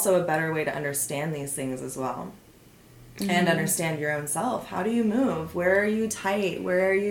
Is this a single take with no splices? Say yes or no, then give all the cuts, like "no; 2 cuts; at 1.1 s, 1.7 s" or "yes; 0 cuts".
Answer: yes; 0 cuts